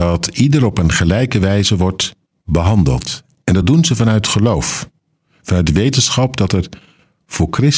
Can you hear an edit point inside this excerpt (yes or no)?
no